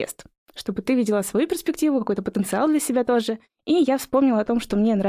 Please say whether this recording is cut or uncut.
uncut